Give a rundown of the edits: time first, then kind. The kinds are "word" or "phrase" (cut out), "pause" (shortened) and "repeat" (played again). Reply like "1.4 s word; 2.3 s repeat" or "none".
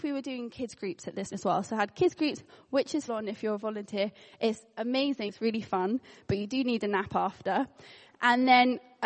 1.3 s word; 3.1 s word; 5.3 s word